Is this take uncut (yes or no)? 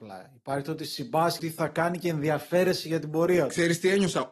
no